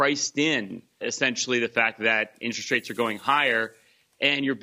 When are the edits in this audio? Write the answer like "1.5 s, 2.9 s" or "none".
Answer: 1.0 s